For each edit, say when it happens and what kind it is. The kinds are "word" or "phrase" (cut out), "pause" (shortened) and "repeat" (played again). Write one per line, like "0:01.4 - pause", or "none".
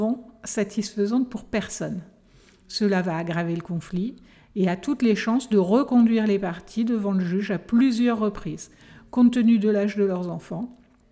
none